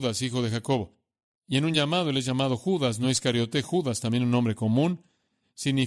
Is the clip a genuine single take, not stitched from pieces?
yes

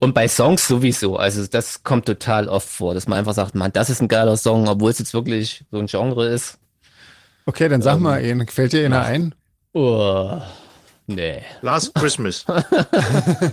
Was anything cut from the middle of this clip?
no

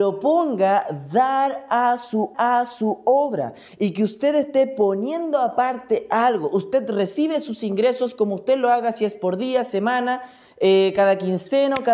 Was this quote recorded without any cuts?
no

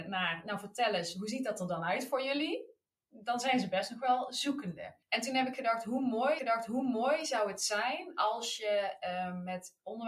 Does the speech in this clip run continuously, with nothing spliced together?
no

